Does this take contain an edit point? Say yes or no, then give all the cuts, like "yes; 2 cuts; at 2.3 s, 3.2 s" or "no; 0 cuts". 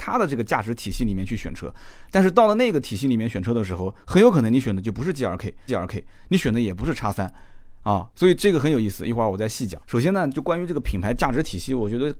yes; 3 cuts; at 5.7 s, 8.1 s, 9.8 s